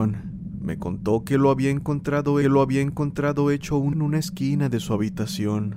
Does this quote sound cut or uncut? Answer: cut